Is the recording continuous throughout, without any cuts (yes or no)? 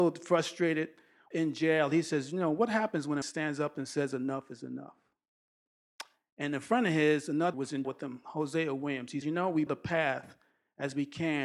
no